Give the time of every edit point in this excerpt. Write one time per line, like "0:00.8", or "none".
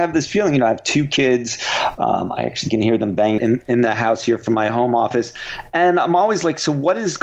0:03.4